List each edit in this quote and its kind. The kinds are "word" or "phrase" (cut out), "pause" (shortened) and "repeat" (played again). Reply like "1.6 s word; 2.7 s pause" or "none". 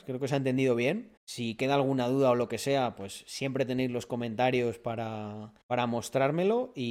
1.2 s pause; 5.6 s pause